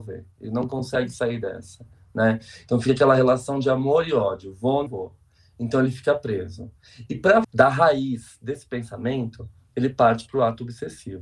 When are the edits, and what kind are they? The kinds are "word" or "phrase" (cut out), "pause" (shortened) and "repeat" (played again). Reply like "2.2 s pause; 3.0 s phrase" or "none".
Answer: 4.9 s word; 7.4 s word